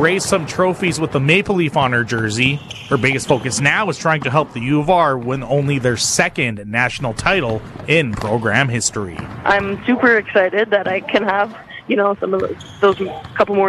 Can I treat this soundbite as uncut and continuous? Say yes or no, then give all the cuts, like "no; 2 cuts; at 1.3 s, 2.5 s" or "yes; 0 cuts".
yes; 0 cuts